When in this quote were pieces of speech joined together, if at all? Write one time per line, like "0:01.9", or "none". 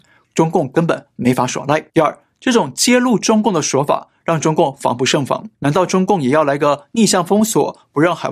0:01.9
0:05.5